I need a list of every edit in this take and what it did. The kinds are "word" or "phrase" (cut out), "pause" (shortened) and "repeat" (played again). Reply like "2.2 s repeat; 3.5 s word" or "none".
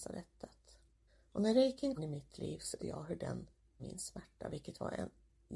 1.1 s pause; 2.0 s phrase; 2.8 s word; 3.8 s word